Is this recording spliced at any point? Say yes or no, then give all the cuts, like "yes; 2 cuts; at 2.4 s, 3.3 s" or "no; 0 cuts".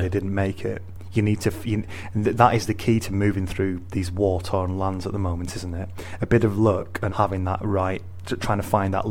yes; 2 cuts; at 2.4 s, 7.1 s